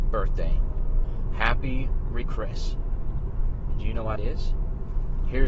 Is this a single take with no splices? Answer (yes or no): no